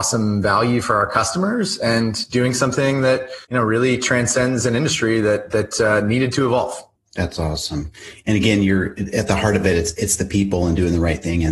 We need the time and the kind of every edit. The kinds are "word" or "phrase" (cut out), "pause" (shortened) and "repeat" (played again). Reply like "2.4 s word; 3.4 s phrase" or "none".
3.4 s pause; 7.0 s pause